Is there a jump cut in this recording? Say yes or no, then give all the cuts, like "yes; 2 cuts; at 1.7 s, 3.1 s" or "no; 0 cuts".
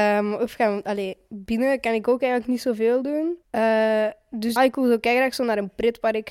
yes; 2 cuts; at 3.4 s, 4.6 s